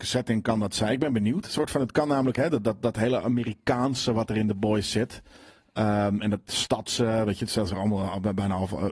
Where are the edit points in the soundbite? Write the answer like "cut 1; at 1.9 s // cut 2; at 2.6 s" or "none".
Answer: none